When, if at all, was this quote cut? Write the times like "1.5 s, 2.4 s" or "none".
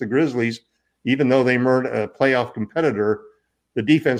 none